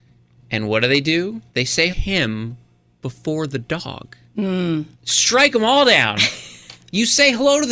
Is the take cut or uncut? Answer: cut